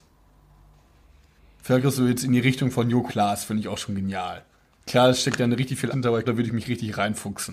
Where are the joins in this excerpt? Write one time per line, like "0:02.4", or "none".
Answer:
0:03.1
0:05.9
0:06.2